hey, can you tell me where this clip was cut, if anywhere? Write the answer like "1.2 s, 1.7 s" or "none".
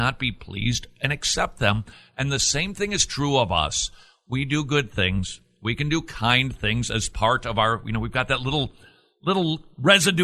none